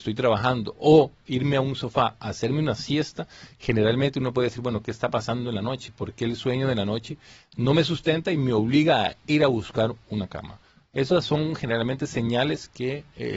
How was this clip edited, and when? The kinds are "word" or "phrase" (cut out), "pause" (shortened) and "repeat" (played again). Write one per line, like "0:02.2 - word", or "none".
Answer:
none